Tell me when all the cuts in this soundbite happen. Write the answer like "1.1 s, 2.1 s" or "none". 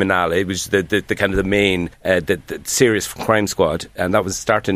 1.9 s